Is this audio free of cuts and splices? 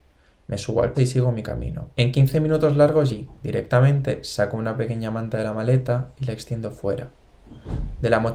no; 3 cuts; at 0.9 s, 1.9 s, 3.1 s

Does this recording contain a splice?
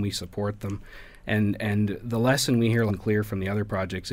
yes; 1 cut; at 2.9 s

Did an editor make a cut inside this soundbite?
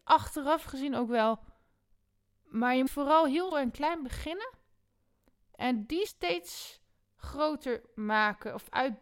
yes; 3 cuts; at 2.9 s, 3.5 s, 6.1 s

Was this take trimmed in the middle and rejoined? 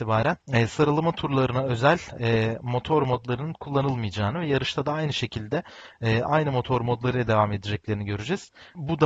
no; 0 cuts

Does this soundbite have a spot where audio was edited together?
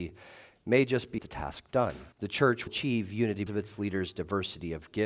yes; 4 cuts; at 1.2 s, 2.1 s, 2.7 s, 3.5 s

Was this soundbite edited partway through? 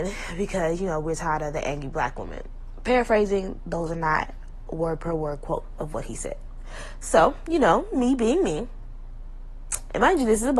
no; 0 cuts

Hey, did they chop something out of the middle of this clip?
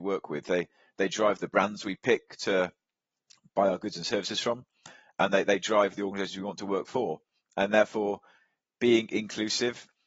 no; 0 cuts

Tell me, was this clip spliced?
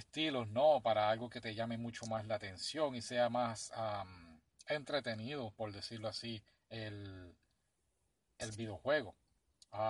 no; 0 cuts

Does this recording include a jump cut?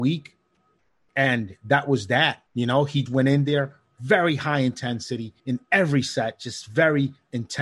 yes; 3 cuts; at 2.5 s, 3.1 s, 5.4 s

